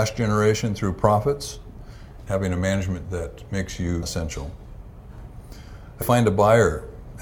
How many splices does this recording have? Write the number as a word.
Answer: four